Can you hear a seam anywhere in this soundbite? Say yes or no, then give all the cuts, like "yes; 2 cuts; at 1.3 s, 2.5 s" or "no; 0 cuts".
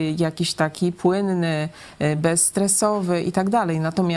no; 0 cuts